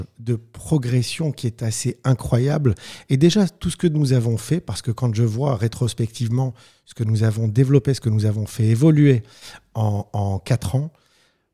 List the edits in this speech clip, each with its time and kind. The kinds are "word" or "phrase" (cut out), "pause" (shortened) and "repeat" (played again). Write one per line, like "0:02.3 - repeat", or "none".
none